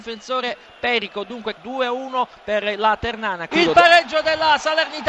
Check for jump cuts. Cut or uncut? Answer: uncut